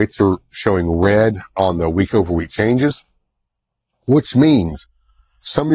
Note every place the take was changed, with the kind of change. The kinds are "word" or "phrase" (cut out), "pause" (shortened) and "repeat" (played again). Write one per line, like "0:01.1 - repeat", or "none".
none